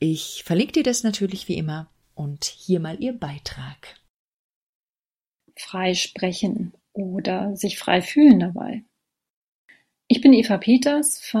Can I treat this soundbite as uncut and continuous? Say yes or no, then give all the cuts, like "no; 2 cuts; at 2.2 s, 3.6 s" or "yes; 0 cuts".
yes; 0 cuts